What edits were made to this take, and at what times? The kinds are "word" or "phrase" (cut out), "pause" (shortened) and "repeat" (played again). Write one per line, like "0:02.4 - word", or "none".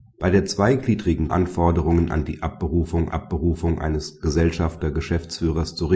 0:01.3 - phrase
0:03.1 - repeat